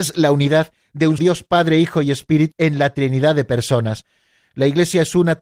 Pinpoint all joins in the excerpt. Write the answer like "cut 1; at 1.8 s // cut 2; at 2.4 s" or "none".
cut 1; at 1.2 s // cut 2; at 2.5 s